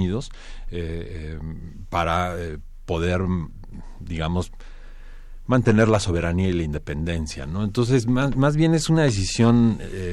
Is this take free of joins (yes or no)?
yes